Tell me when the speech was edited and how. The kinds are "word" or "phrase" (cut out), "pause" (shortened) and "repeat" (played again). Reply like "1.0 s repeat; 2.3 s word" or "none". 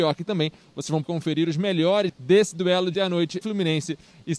1.0 s word; 2.1 s word; 2.9 s word; 3.4 s word

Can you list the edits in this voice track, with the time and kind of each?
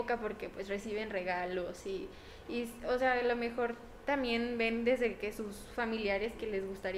none

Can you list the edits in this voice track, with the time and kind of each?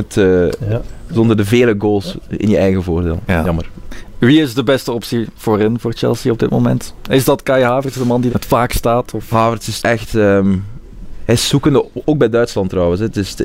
8.3 s word; 9.8 s word

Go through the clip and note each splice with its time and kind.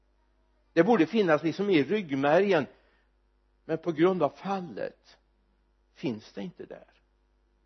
none

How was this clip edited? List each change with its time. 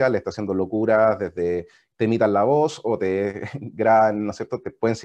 none

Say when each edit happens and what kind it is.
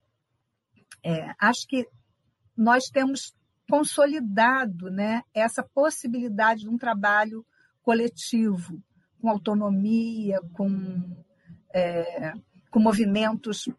none

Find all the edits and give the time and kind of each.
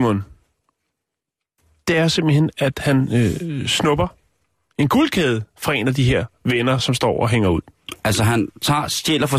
none

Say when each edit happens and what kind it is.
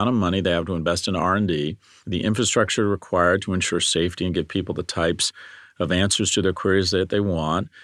none

